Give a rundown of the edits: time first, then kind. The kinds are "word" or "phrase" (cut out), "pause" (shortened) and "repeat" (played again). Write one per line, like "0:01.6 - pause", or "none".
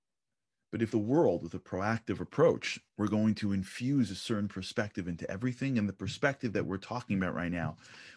0:00.9 - phrase
0:02.9 - pause